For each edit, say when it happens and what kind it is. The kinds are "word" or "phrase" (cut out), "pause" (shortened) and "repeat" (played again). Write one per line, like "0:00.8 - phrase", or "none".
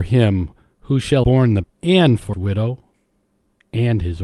0:01.2 - word
0:01.6 - word
0:02.3 - word